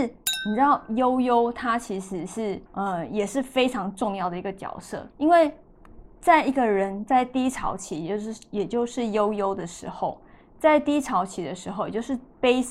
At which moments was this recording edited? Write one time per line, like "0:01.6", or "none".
0:02.7
0:05.1